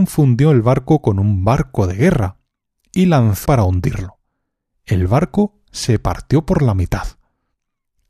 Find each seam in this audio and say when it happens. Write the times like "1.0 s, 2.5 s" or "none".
3.5 s